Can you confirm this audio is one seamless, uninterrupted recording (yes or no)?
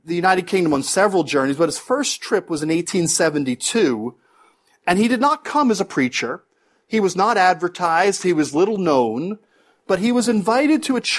yes